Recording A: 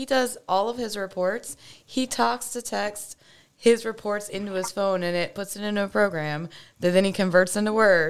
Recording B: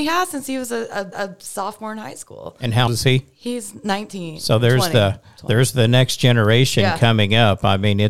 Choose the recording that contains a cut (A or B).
B